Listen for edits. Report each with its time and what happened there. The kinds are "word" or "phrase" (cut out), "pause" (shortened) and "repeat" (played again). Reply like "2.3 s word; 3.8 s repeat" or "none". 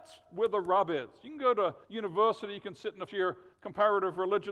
1.8 s pause; 3.1 s word; 3.5 s pause